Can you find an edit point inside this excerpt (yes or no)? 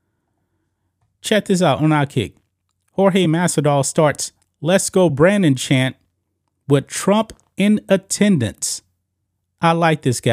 no